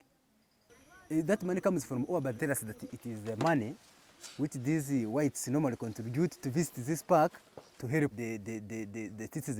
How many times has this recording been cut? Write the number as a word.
three